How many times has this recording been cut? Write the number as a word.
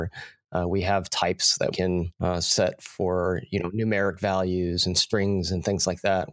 two